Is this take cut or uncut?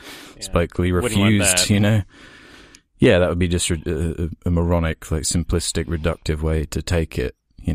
uncut